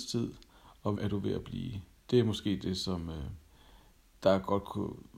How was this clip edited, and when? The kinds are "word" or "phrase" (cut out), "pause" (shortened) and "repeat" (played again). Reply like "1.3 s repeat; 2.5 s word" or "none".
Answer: 1.0 s word